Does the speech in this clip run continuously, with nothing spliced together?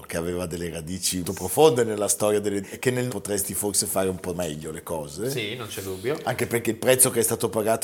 no; 3 cuts; at 1.2 s, 2.6 s, 3.1 s

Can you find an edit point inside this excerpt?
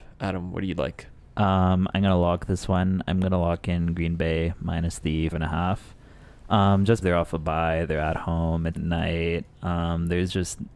yes; 4 cuts; at 1.3 s, 5.3 s, 7.0 s, 8.8 s

